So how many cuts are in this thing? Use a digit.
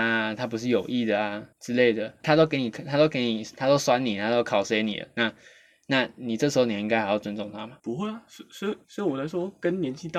4